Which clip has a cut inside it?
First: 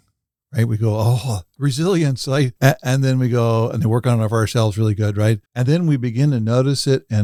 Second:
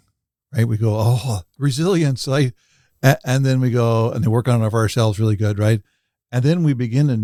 first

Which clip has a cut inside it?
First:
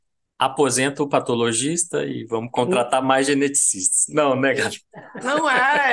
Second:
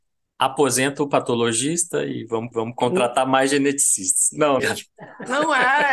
second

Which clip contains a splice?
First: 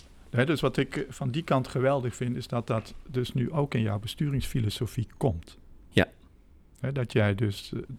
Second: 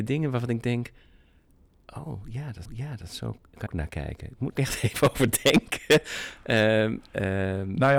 second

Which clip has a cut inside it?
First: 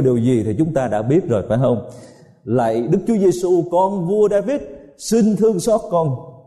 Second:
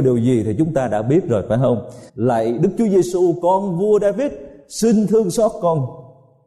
second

